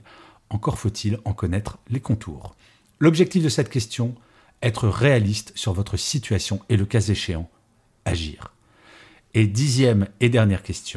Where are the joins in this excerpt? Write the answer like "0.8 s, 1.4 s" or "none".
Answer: none